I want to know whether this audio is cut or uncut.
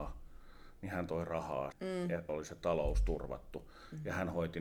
cut